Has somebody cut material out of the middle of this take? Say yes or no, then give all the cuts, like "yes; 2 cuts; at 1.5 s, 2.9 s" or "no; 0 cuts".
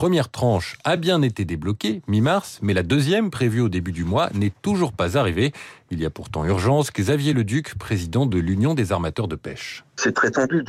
no; 0 cuts